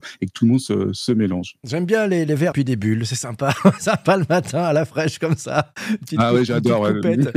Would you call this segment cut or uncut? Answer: cut